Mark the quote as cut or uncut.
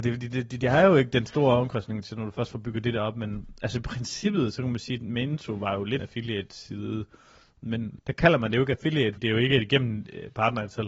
cut